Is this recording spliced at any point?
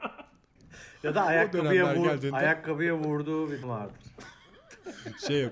yes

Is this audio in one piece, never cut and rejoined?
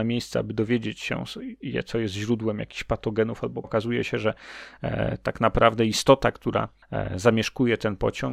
no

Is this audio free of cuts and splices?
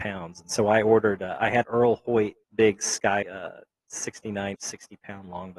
no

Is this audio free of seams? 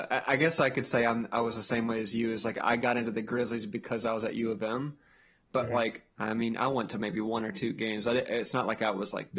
yes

